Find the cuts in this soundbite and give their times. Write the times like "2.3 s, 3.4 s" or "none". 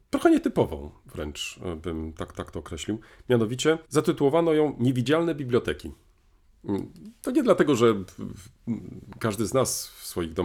2.3 s, 3.8 s